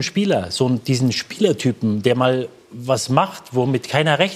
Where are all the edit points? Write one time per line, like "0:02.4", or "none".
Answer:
none